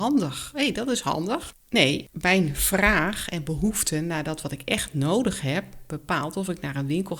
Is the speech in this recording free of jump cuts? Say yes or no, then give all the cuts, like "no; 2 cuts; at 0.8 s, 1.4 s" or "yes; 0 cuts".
yes; 0 cuts